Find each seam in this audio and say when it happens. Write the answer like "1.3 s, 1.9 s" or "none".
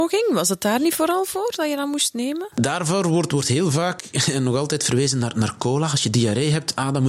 none